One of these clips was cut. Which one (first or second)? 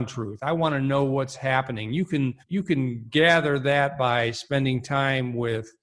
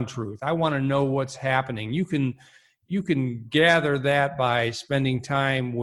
first